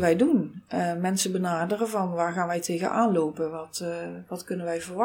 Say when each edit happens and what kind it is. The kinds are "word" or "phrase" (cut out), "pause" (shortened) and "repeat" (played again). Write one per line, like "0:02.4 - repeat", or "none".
none

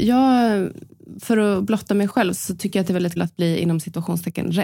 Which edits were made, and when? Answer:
0:02.3 - word
0:03.2 - word

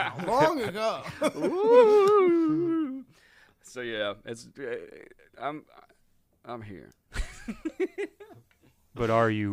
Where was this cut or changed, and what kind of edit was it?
none

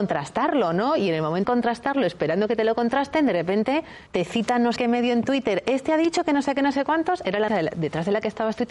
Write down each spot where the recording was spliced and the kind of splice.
0:01.4 - word
0:04.1 - pause
0:04.8 - word
0:07.5 - word

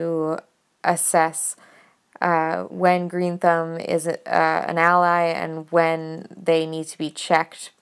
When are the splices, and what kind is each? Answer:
none

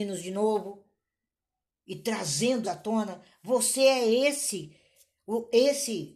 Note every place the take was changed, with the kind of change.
0:02.6 - word

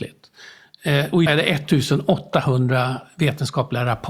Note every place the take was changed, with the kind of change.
0:01.3 - word

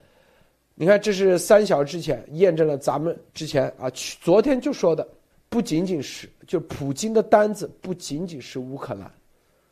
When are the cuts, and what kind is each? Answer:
0:03.3 - pause
0:05.3 - pause

